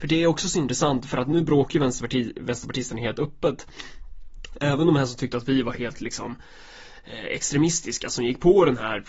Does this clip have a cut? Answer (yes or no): no